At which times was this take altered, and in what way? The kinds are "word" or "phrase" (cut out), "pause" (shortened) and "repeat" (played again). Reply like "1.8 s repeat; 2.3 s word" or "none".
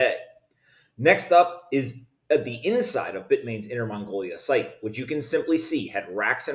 none